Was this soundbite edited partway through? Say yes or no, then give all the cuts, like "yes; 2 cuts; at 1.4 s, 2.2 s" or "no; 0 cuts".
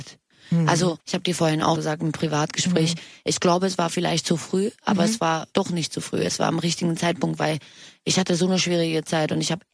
yes; 3 cuts; at 1.0 s, 1.8 s, 5.5 s